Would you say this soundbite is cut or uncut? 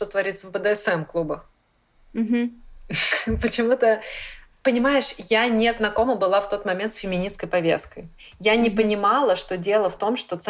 uncut